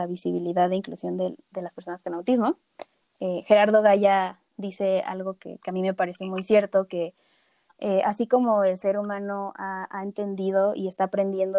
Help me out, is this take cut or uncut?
cut